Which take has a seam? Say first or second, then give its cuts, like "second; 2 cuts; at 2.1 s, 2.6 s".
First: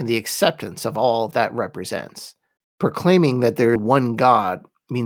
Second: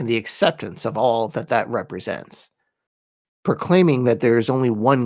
first; 3 cuts; at 1.3 s, 2.6 s, 3.8 s